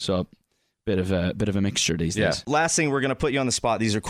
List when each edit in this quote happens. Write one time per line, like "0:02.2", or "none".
none